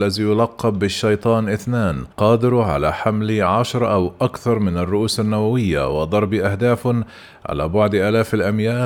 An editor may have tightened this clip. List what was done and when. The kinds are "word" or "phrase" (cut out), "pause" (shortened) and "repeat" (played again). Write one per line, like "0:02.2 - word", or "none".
0:02.1 - pause